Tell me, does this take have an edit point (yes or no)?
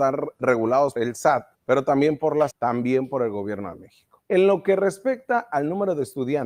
yes